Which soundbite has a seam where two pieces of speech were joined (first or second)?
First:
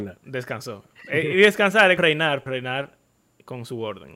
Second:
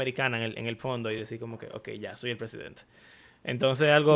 first